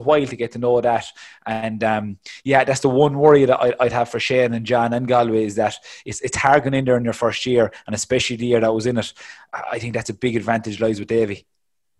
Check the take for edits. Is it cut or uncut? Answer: uncut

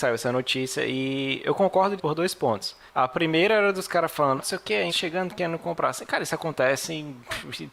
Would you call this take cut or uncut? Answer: cut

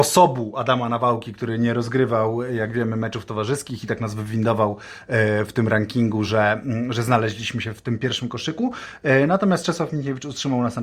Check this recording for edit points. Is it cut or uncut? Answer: uncut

